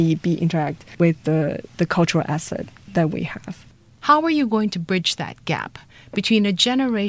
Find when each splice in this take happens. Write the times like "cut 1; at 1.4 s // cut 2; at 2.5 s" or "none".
none